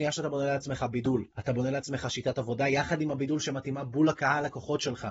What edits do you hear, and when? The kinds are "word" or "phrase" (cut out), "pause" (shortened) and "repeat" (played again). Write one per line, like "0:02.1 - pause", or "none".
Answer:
none

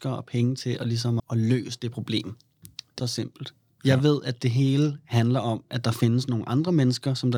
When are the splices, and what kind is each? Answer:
0:01.2 - word
0:03.0 - phrase

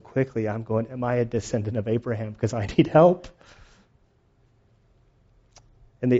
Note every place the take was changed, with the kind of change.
none

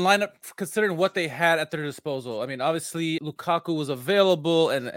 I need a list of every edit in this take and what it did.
0:03.2 - word

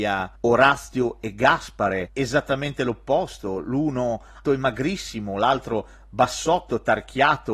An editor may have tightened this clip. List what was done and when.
0:04.4 - word

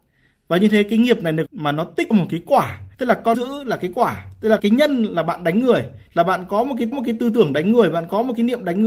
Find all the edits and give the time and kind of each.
0:01.5 - phrase
0:02.1 - phrase
0:02.9 - pause
0:03.3 - phrase
0:04.6 - word
0:06.1 - pause
0:06.9 - repeat

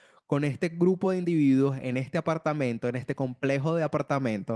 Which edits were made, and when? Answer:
none

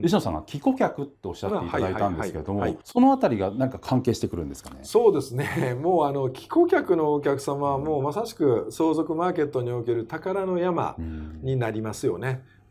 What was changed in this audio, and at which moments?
0:02.8 - pause

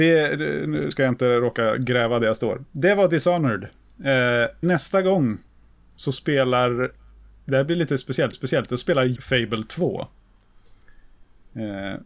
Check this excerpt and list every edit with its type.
0:00.9 - word
0:04.6 - word
0:08.3 - repeat
0:09.2 - word

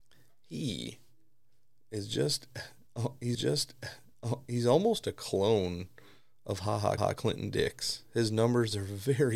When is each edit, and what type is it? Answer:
0:03.3 - repeat
0:07.0 - repeat

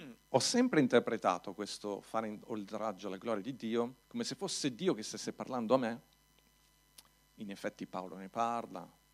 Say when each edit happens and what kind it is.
0:04.0 - pause

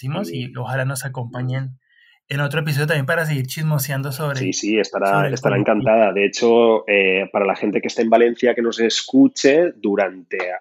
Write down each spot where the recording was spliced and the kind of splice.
none

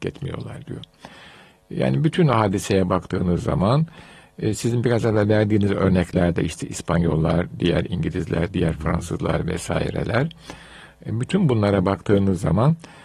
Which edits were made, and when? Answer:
none

